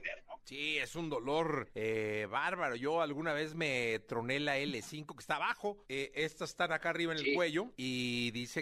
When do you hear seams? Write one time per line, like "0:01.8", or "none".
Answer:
none